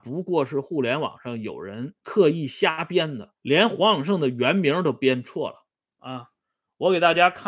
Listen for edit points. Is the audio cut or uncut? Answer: cut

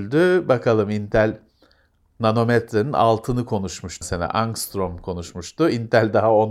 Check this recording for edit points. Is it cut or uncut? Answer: cut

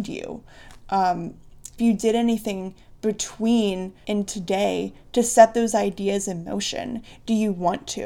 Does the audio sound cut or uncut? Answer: cut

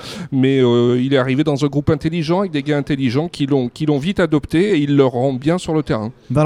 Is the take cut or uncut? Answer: uncut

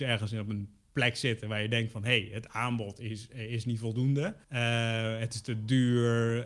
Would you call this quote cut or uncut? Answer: cut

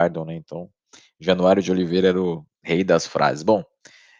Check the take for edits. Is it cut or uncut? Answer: cut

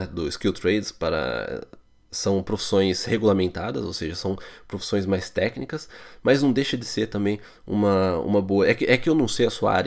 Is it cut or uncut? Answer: uncut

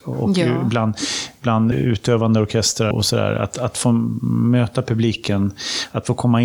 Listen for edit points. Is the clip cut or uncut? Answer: cut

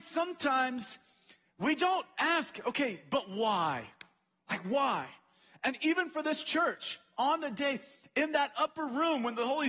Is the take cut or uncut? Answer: uncut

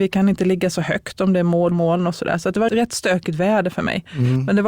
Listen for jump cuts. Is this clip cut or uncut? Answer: cut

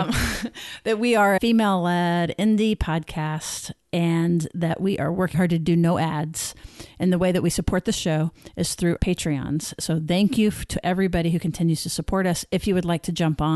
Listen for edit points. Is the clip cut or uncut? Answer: cut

